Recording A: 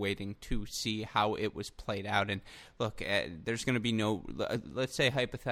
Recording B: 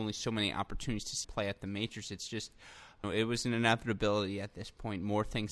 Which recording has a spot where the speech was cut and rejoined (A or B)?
B